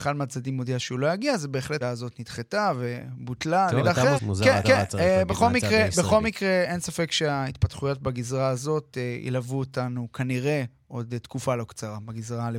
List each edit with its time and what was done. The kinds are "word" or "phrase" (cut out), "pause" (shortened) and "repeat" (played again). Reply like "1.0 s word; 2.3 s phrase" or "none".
1.8 s phrase; 3.8 s word; 4.2 s word; 4.6 s repeat